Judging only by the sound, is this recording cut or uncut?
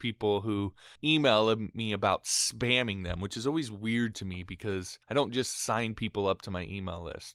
cut